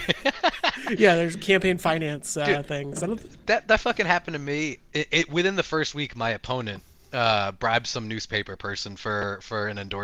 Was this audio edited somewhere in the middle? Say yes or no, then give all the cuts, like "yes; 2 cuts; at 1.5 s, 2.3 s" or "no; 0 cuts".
no; 0 cuts